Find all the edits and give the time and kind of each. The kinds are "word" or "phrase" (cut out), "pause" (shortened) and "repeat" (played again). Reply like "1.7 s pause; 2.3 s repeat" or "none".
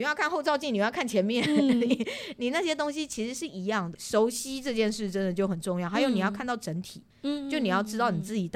none